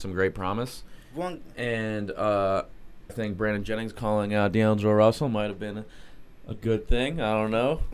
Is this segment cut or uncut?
cut